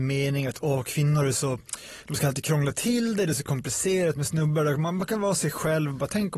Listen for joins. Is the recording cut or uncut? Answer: uncut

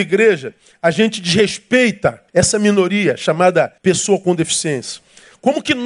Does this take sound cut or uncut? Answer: cut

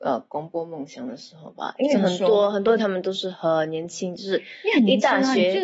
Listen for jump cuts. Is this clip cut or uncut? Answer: cut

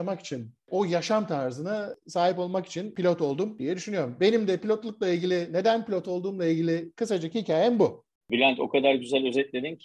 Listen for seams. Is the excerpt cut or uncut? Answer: uncut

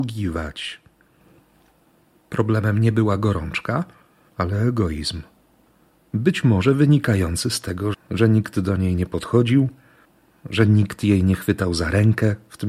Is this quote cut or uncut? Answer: cut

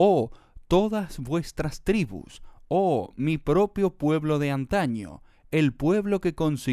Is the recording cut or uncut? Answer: uncut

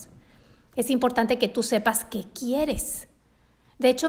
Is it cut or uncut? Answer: uncut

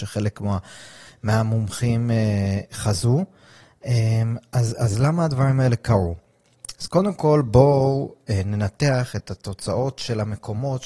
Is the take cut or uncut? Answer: uncut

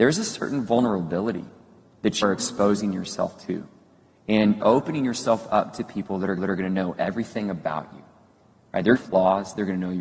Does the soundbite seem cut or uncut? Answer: cut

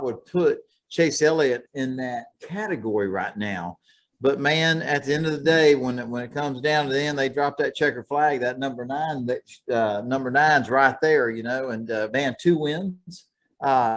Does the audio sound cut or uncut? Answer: uncut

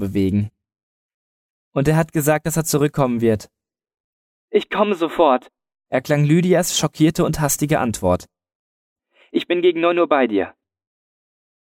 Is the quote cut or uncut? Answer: uncut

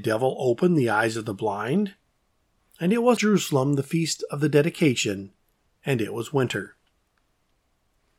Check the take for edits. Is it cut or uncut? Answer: cut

